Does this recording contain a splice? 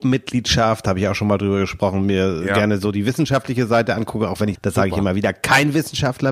yes; 1 cut; at 4.5 s

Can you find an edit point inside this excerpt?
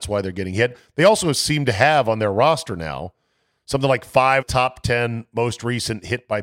yes; 1 cut; at 4.4 s

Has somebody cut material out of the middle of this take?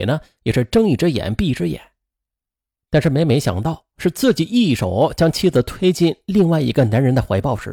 no; 0 cuts

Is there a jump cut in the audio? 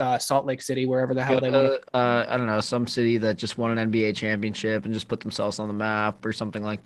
no; 0 cuts

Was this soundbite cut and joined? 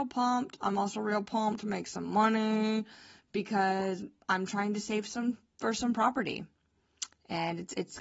no; 0 cuts

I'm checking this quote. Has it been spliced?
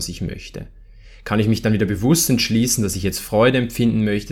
no; 0 cuts

